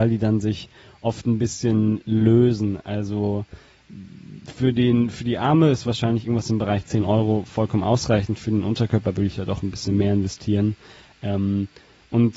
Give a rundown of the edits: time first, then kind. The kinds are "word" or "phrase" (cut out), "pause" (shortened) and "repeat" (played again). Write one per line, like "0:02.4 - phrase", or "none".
none